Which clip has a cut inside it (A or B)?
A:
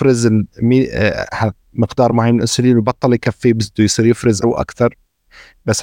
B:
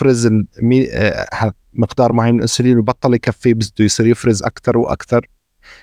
A